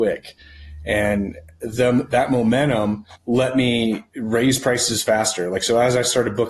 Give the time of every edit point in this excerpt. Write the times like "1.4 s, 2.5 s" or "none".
3.2 s, 4.1 s